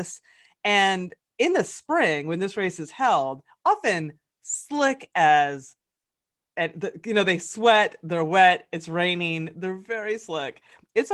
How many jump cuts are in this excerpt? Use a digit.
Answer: 0